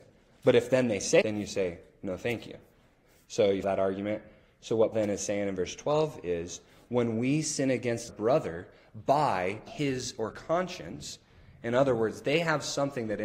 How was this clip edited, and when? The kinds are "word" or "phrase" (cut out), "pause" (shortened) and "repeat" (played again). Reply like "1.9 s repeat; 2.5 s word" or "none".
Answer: 1.2 s word; 3.6 s word; 4.9 s word; 8.1 s word; 9.7 s word; 10.3 s word